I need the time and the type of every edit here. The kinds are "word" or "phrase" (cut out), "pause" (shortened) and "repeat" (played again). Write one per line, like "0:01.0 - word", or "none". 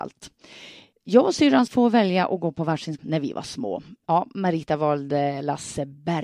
0:00.9 - pause
0:01.7 - word
0:03.0 - word